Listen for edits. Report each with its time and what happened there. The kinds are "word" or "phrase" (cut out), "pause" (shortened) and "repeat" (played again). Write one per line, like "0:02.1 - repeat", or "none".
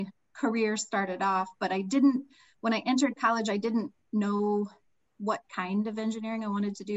0:05.1 - word